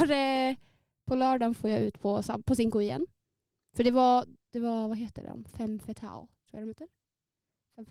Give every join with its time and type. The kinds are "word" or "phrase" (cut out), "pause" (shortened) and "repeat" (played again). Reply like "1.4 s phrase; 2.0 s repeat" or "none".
none